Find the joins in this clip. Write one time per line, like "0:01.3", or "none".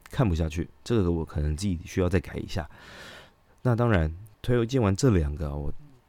0:04.3

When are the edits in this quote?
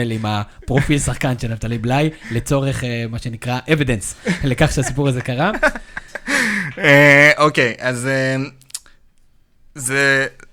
none

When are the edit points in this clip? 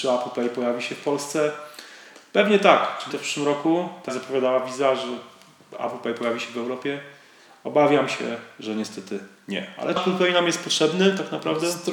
0:03.1
0:04.1
0:10.0

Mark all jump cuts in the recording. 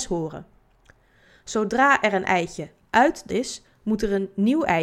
0:03.3

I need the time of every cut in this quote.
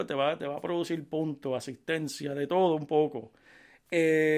none

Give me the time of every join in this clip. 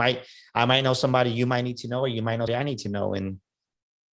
0:02.5

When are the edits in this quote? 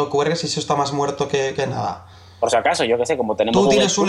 none

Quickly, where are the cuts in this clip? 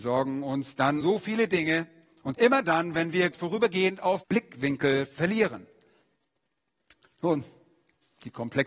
0:01.0
0:02.3
0:03.3
0:04.2

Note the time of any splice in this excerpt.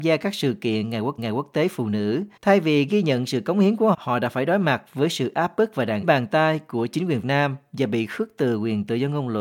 0:01.2
0:02.4
0:03.9
0:06.0
0:07.2

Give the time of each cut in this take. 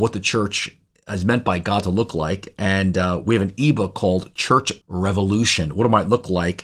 0:04.8

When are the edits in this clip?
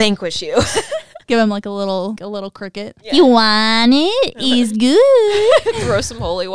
0:02.2
0:03.0

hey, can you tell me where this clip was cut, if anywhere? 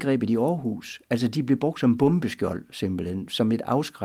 none

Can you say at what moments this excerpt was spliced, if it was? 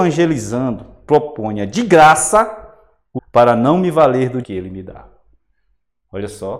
0:03.2
0:04.4

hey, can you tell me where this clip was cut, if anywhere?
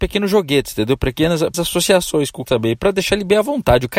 0:01.5
0:02.4

